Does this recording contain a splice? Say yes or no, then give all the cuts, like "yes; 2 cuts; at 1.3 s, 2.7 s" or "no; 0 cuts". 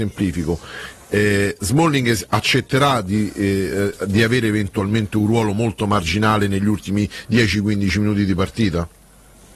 no; 0 cuts